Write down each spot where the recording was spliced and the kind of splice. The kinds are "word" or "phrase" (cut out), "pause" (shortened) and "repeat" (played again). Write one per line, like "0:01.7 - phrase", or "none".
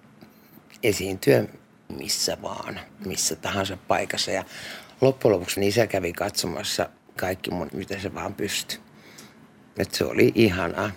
0:01.9 - word
0:02.9 - pause
0:05.6 - word
0:07.2 - word
0:07.7 - word

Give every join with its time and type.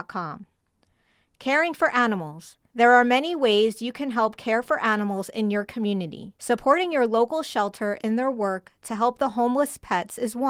0:02.7 - pause
0:06.3 - pause

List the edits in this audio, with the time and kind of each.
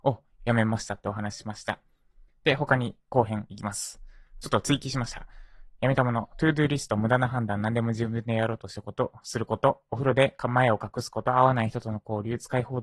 none

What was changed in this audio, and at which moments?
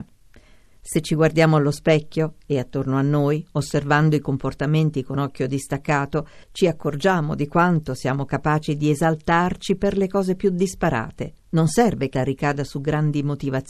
0:06.4 - pause
0:11.4 - pause
0:12.1 - phrase

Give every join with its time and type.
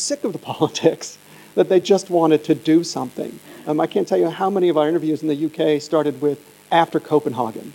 none

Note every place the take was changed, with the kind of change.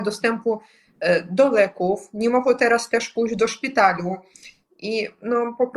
none

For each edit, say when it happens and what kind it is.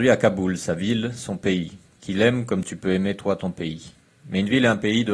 none

